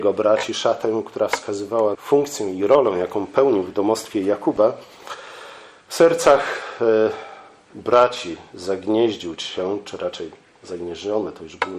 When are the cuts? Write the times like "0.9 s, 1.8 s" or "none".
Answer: 1.9 s